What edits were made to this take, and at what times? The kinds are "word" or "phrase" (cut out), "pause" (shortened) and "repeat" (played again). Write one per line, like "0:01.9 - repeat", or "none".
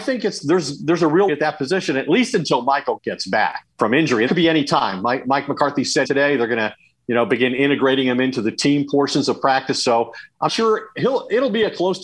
0:01.3 - word
0:03.0 - word
0:04.3 - word
0:06.0 - word
0:10.5 - word